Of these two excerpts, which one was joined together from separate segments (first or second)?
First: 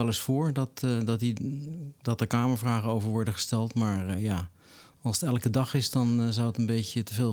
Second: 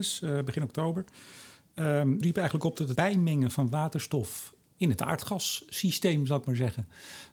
second